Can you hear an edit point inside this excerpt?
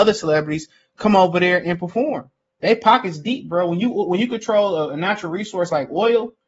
no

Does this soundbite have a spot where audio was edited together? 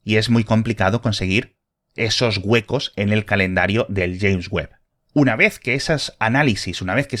no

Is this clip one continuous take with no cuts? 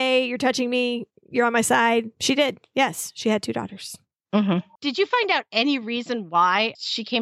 yes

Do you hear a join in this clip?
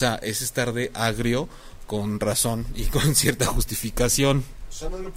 no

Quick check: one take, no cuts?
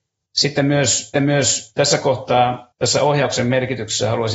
no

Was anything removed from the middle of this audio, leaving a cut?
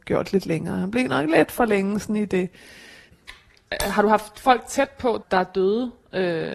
no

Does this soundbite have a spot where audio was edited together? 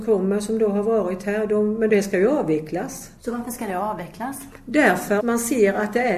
yes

